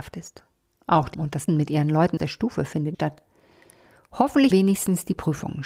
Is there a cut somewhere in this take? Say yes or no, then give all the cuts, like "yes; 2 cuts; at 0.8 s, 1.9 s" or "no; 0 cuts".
yes; 5 cuts; at 1.1 s, 1.5 s, 2.2 s, 2.9 s, 4.5 s